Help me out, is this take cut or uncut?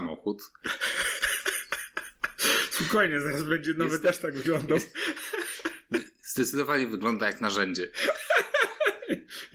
uncut